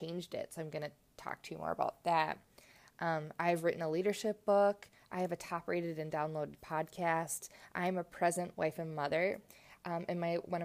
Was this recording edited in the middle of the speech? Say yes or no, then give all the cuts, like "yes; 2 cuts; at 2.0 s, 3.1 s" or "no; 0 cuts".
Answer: no; 0 cuts